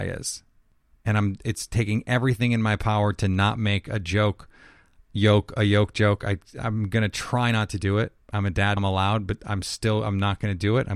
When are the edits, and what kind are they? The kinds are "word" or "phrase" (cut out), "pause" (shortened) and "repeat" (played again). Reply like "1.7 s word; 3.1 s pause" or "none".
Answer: 8.2 s pause; 8.8 s word